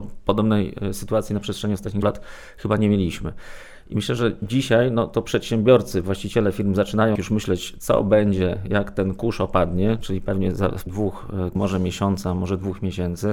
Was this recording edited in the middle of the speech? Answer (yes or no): yes